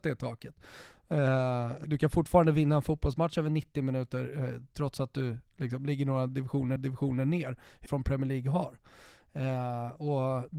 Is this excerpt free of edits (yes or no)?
no